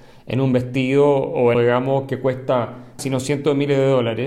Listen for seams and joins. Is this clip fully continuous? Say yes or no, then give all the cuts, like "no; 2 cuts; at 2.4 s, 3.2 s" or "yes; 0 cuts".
no; 2 cuts; at 1.5 s, 3.0 s